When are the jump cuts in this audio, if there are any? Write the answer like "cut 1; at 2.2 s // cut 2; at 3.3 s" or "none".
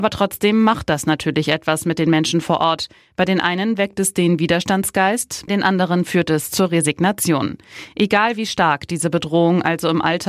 cut 1; at 5.5 s